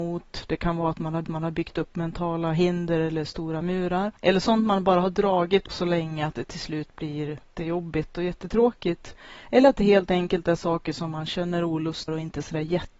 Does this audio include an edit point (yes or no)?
yes